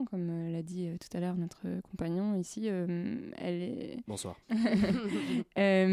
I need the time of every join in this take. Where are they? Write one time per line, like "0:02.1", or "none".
0:04.4